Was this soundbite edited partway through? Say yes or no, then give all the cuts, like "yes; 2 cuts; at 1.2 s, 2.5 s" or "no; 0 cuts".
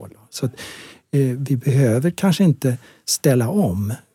no; 0 cuts